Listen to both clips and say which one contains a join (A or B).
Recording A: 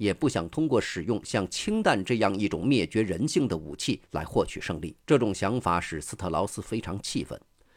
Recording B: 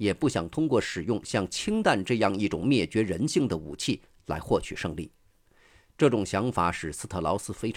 A